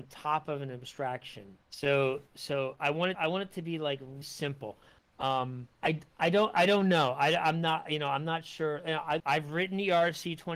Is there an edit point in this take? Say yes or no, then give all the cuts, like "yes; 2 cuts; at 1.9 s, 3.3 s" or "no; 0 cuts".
yes; 5 cuts; at 1.6 s, 3.1 s, 4.2 s, 5.7 s, 9.2 s